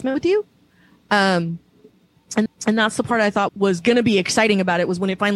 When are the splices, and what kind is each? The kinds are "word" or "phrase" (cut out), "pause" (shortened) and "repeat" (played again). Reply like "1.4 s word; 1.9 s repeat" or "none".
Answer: 2.5 s repeat; 3.5 s word